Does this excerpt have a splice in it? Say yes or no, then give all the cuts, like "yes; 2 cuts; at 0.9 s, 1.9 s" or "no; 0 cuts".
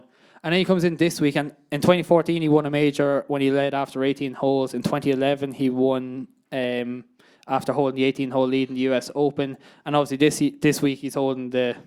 no; 0 cuts